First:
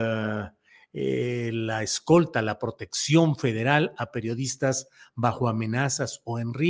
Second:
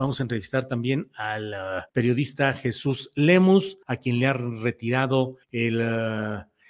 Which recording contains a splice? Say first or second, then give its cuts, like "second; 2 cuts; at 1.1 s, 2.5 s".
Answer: second; 3 cuts; at 1.9 s, 3.8 s, 5.4 s